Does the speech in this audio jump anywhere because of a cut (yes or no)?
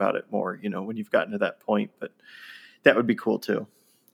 no